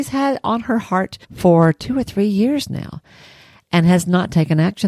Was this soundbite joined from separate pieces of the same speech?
yes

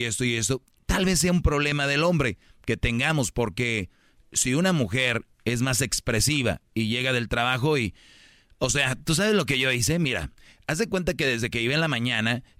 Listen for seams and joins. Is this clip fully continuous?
no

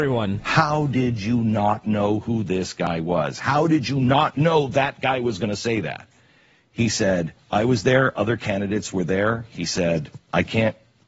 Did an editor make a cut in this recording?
no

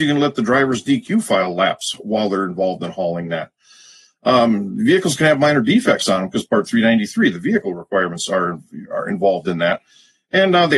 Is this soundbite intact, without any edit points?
yes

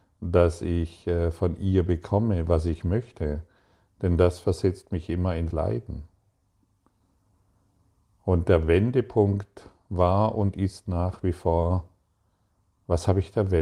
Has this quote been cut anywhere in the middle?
yes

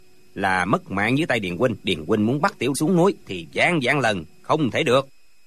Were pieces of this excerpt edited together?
yes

